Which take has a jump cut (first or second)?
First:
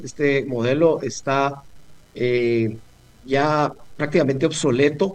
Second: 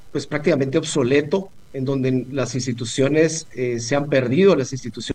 first